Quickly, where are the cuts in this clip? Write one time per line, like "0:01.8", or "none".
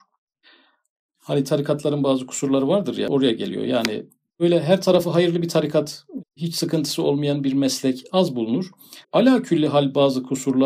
0:09.0